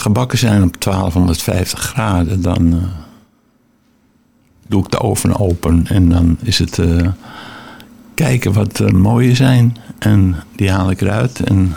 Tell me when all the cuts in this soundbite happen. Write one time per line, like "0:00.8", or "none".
none